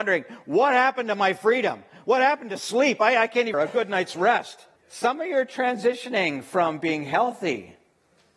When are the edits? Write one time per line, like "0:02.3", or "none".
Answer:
0:03.5
0:04.8

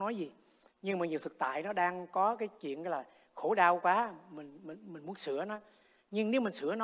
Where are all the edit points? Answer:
none

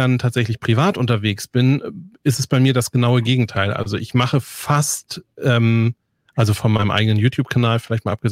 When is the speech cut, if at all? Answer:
none

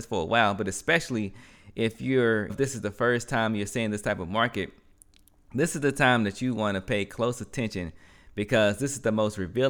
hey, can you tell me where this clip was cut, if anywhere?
0:02.5

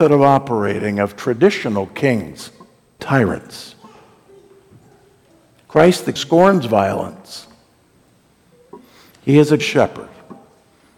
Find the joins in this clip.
0:03.0
0:06.2
0:09.6

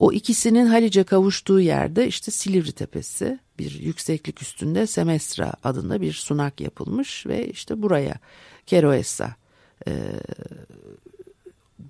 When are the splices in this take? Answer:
none

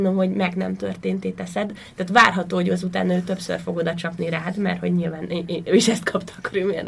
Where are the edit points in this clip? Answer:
none

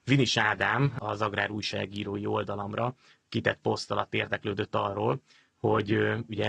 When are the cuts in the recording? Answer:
none

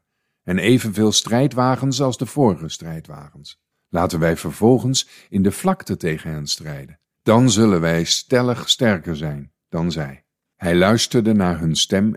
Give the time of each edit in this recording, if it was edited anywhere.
0:03.7
0:07.1
0:10.5

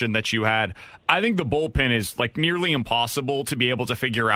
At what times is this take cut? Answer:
none

